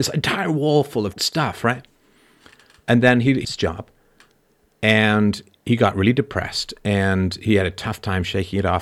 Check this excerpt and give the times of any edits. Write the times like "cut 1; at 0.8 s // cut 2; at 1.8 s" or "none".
cut 1; at 1.1 s // cut 2; at 3.4 s